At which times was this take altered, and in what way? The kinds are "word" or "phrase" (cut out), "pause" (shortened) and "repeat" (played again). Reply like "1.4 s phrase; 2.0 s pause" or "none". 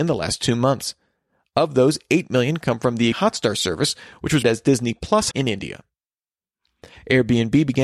3.1 s word; 4.4 s word; 5.3 s word

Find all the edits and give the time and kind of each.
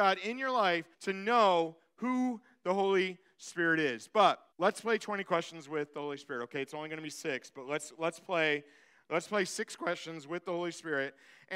0.9 s pause; 4.5 s pause

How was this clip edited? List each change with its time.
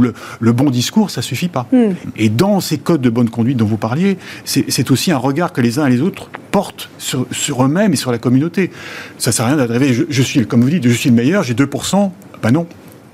none

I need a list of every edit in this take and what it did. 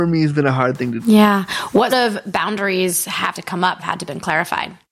1.0 s word; 1.9 s word; 3.3 s word; 3.8 s word

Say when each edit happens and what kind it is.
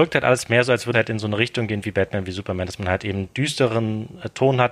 0.9 s word

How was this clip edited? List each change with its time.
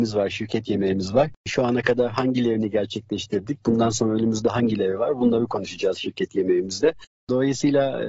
1.4 s pause

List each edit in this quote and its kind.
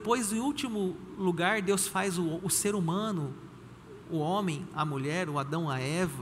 none

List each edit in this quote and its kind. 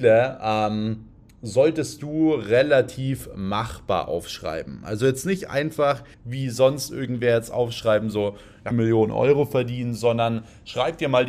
6.1 s pause; 8.7 s phrase

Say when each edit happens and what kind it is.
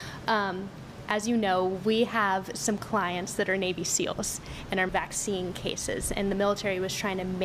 4.9 s word

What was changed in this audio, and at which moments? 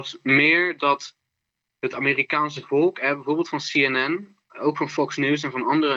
none

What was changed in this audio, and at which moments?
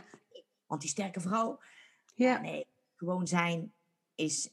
none

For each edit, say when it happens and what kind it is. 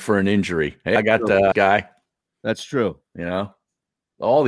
1.0 s word; 1.5 s phrase

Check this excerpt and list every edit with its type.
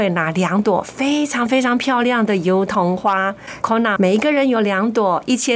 3.6 s word; 4.0 s word

